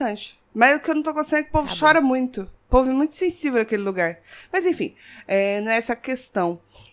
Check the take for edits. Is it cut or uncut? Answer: uncut